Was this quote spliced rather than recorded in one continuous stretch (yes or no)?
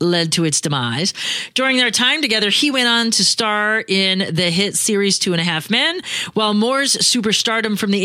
no